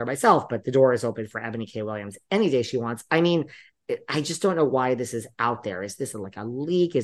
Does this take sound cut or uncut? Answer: uncut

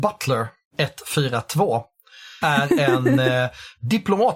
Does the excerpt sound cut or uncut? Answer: cut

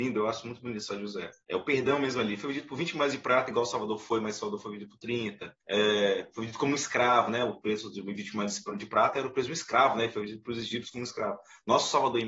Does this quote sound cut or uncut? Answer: cut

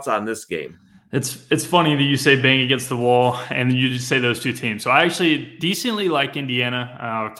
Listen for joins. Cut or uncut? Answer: uncut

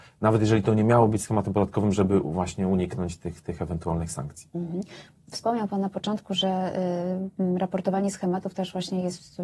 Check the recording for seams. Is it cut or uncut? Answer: uncut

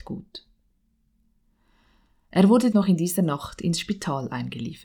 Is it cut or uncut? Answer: cut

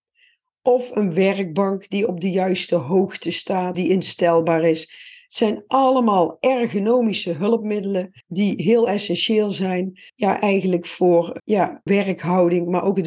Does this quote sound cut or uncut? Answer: cut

